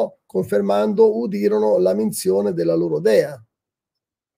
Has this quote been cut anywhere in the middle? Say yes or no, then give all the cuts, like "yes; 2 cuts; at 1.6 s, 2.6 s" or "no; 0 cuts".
no; 0 cuts